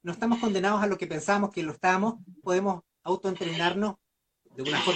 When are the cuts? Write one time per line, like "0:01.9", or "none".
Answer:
0:02.4